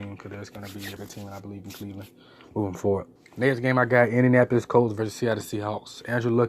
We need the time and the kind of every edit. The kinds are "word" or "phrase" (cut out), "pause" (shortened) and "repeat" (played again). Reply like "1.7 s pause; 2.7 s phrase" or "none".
1.0 s word; 3.2 s pause